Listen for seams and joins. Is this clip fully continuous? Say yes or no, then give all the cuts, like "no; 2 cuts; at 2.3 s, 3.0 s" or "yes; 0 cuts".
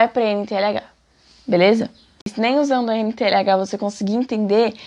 yes; 0 cuts